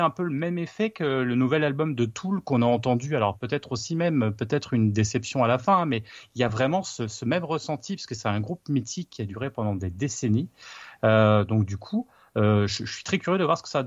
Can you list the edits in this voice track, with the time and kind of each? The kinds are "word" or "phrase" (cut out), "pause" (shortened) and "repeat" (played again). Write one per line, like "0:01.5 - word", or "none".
none